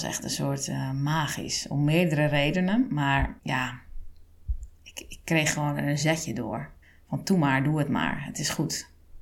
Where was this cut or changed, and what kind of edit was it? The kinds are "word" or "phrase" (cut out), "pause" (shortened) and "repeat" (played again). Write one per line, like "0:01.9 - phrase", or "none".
0:03.4 - pause
0:06.8 - pause